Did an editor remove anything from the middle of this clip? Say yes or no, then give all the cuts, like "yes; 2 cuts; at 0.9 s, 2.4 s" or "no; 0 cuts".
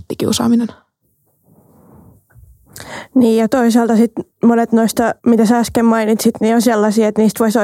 yes; 1 cut; at 5.2 s